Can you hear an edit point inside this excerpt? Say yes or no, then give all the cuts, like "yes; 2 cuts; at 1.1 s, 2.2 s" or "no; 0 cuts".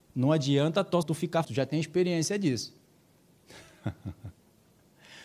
yes; 2 cuts; at 1.0 s, 1.4 s